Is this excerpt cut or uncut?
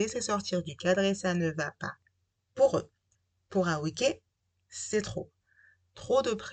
uncut